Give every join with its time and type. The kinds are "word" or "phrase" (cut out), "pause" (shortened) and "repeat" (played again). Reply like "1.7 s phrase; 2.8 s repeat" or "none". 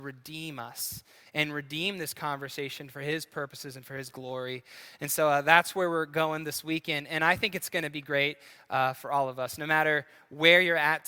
none